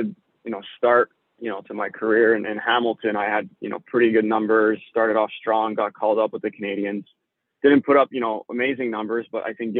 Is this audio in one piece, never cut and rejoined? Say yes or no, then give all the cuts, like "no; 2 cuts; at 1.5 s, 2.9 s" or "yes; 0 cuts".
yes; 0 cuts